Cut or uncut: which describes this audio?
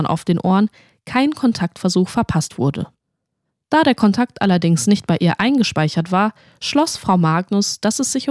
uncut